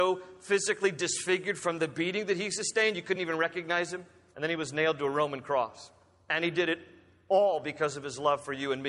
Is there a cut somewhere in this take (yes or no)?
no